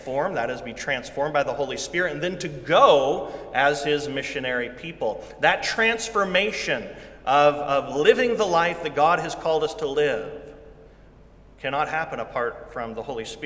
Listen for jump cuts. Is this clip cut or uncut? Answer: uncut